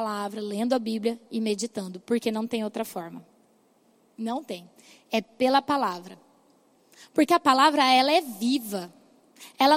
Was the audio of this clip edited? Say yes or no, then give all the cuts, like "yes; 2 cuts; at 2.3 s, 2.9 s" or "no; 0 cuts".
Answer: no; 0 cuts